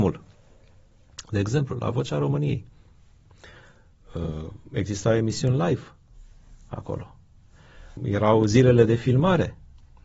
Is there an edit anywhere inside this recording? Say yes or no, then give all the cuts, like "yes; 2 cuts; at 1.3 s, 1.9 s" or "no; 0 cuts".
yes; 2 cuts; at 4.6 s, 8.0 s